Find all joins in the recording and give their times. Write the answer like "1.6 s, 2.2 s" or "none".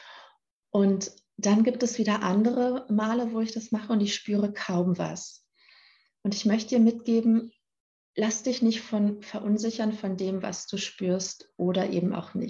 none